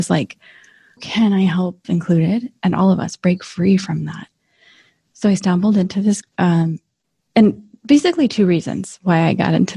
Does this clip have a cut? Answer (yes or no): yes